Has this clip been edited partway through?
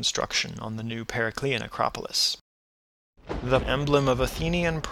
yes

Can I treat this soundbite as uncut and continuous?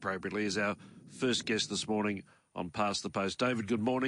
yes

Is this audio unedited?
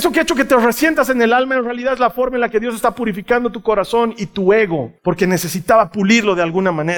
no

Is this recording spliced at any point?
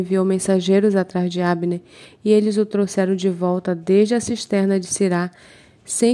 no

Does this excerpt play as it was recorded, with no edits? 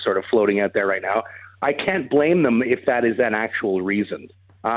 yes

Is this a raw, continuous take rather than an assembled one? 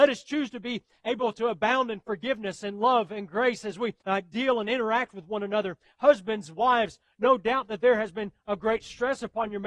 no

